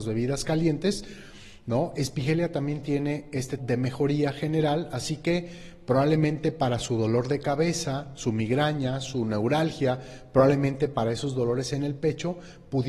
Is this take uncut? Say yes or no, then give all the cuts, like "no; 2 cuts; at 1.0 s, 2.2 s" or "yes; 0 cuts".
no; 1 cut; at 3.6 s